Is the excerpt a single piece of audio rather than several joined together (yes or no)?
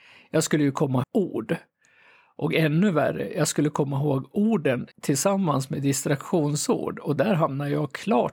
no